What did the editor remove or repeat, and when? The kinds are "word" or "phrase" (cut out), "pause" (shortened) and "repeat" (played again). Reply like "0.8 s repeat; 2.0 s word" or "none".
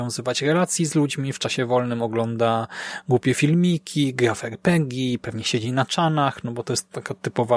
none